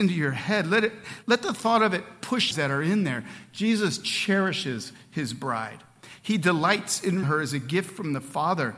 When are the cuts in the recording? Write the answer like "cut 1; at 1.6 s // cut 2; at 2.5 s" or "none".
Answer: cut 1; at 1.2 s // cut 2; at 2.5 s // cut 3; at 7.2 s